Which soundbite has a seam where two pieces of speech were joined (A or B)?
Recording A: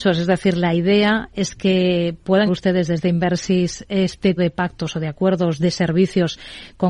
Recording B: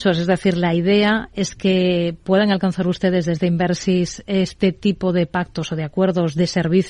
A